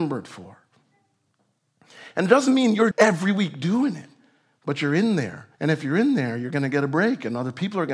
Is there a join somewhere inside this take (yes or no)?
yes